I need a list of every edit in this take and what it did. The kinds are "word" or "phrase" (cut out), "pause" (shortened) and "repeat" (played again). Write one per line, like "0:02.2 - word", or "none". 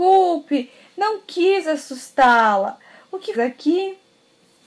0:03.3 - word